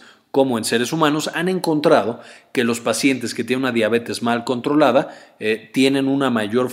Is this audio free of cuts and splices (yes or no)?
yes